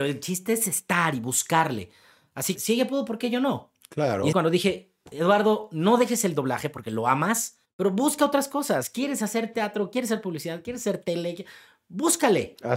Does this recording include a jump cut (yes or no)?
yes